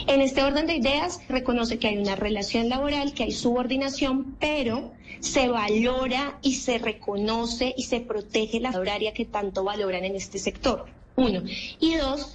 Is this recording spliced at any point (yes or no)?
yes